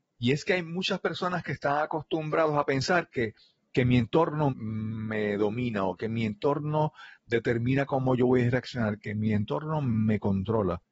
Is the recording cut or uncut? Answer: cut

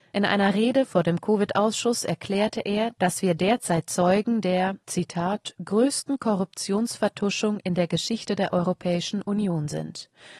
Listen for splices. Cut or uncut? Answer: uncut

